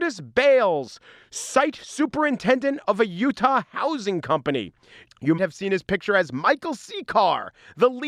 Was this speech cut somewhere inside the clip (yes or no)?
yes